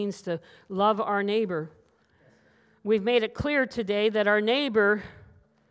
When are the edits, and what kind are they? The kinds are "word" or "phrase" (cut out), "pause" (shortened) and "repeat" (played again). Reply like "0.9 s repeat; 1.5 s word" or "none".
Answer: none